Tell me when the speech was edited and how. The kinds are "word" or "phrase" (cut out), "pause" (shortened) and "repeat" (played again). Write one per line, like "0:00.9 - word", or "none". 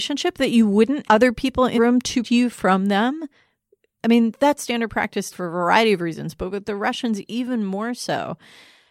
0:01.0 - word
0:01.8 - word
0:02.2 - word
0:04.6 - word
0:05.3 - word